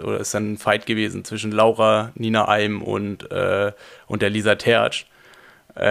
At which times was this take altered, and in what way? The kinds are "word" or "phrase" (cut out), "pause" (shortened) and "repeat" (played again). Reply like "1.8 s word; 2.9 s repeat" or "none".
none